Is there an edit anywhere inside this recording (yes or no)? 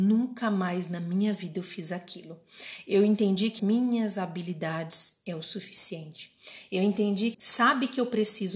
yes